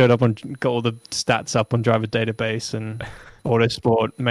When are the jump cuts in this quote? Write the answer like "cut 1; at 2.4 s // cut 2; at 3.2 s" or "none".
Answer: cut 1; at 3.4 s